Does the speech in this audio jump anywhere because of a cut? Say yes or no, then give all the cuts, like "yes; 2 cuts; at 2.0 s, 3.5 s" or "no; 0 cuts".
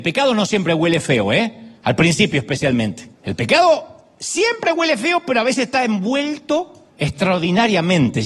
yes; 3 cuts; at 1.8 s, 3.1 s, 6.9 s